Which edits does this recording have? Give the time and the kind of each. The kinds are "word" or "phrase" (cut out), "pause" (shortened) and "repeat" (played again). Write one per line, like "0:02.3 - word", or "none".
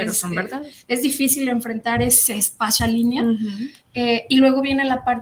0:02.8 - word